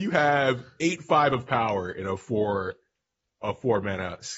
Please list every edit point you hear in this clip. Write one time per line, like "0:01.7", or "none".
none